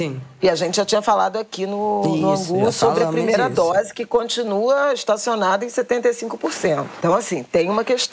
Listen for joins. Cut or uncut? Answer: uncut